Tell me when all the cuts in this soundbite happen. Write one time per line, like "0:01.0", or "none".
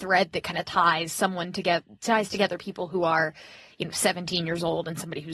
none